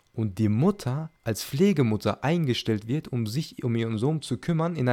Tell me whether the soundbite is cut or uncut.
cut